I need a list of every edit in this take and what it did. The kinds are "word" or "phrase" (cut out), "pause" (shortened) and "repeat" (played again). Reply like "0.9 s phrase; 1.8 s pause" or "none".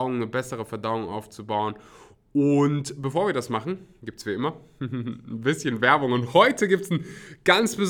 none